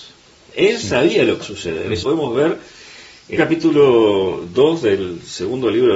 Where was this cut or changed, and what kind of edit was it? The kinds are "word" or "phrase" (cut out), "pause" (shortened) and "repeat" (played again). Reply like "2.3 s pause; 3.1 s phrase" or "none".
1.4 s word; 2.0 s word; 3.4 s word